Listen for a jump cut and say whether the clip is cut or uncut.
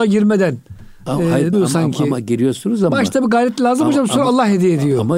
cut